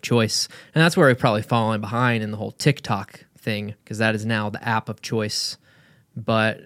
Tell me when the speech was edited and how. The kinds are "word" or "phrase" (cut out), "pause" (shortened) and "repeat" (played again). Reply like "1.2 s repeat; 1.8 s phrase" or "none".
3.8 s pause